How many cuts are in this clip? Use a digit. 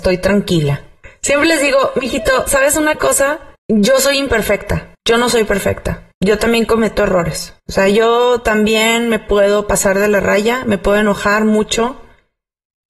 4